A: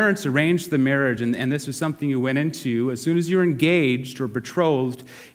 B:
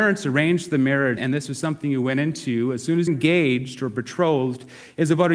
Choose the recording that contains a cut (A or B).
B